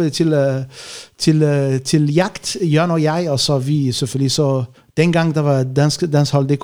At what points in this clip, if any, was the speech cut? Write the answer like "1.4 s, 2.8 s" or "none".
4.8 s